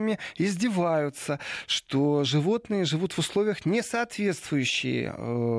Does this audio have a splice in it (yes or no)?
no